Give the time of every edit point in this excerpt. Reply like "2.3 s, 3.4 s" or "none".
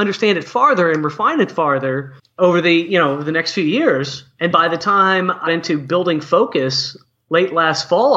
2.2 s, 4.5 s, 5.5 s